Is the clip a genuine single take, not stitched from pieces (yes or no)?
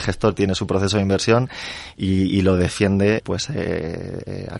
no